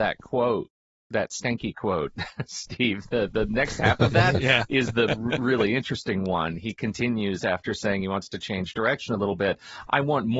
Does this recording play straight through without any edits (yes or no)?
yes